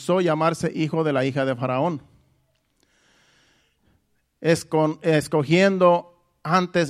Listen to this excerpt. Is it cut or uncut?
uncut